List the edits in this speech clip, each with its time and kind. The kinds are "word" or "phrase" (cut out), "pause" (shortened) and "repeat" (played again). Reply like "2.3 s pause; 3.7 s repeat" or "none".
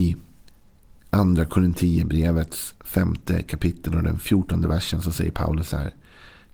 none